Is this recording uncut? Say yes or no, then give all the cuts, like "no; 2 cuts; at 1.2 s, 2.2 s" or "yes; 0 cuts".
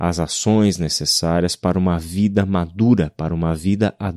yes; 0 cuts